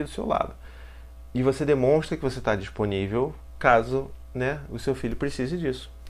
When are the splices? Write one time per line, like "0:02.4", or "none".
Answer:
none